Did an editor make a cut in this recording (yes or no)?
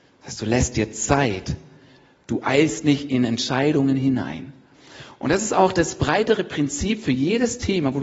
no